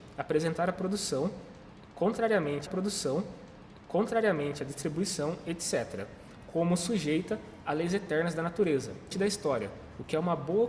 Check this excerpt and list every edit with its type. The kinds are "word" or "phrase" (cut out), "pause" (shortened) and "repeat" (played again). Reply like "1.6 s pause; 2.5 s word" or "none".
2.7 s repeat; 9.1 s word